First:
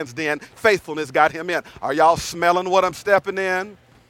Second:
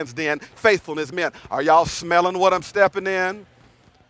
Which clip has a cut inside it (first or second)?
second